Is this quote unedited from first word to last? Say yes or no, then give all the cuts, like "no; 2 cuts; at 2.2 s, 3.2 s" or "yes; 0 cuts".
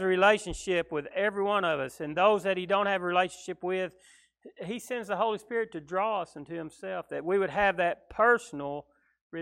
yes; 0 cuts